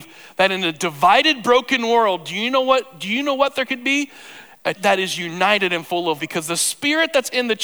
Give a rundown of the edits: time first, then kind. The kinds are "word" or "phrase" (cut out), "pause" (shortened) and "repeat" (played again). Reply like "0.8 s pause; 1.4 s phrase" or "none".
4.8 s word; 6.2 s word